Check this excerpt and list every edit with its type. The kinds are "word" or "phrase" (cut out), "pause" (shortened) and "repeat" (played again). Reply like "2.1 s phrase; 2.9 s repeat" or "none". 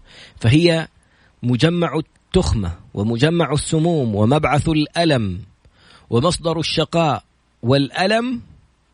none